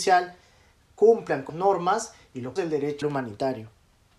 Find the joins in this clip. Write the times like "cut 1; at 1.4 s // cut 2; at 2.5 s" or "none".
cut 1; at 1.5 s // cut 2; at 2.6 s // cut 3; at 3.0 s